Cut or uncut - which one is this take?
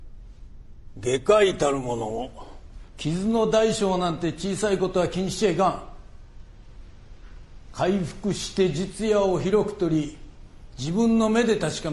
cut